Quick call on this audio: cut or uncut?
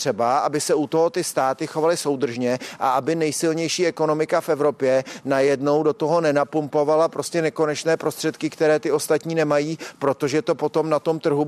uncut